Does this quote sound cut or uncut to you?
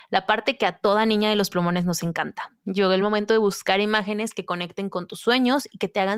uncut